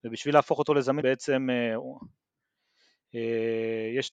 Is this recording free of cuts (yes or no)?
no